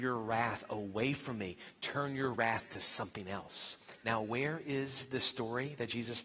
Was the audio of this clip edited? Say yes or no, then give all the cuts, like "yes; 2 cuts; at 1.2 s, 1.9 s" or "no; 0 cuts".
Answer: no; 0 cuts